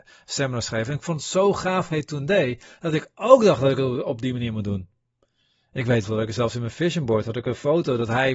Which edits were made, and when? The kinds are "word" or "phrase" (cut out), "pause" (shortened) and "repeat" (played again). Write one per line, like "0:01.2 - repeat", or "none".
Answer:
0:01.9 - word
0:06.0 - word